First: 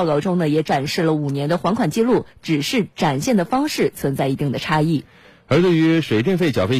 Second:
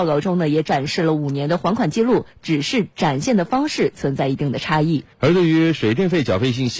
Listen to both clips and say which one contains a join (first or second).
second